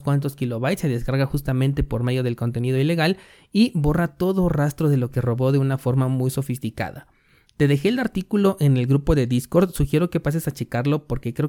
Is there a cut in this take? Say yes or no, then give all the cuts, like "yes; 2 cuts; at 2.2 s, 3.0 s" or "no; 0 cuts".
no; 0 cuts